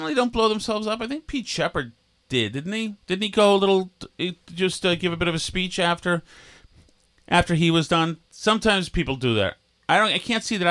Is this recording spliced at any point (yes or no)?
yes